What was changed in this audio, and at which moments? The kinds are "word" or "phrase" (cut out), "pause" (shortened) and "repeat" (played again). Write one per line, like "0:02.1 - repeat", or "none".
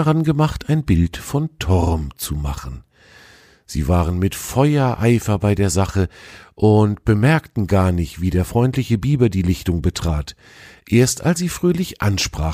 0:11.4 - word